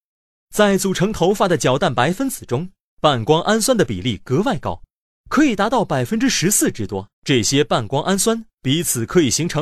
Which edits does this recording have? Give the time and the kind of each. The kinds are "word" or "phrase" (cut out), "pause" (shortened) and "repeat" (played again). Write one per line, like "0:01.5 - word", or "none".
0:07.1 - pause